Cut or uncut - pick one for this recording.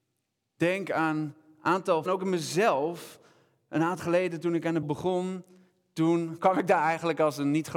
cut